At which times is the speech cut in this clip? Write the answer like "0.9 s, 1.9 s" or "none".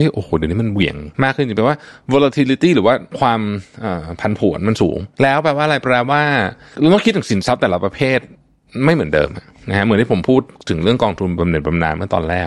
1.1 s